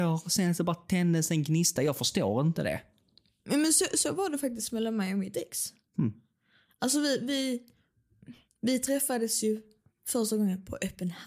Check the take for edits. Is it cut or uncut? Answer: uncut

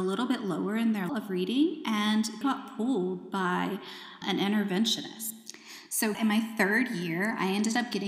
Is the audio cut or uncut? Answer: cut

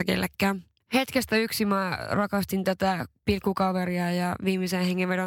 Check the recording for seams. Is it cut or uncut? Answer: uncut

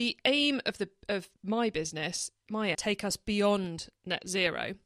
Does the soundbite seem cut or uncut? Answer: cut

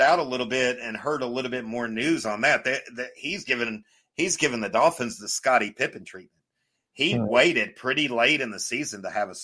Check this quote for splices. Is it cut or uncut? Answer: uncut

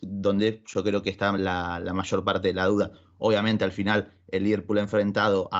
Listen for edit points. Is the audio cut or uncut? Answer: uncut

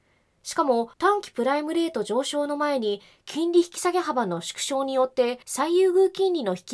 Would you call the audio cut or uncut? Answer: cut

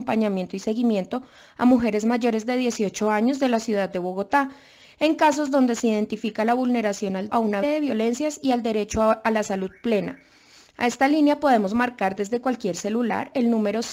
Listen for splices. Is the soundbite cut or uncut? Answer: cut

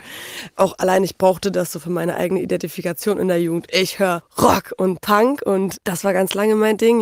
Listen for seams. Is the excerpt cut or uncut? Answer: uncut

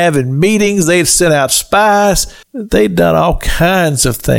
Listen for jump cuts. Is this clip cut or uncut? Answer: cut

